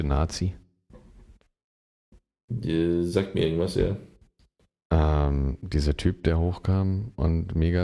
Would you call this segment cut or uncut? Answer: uncut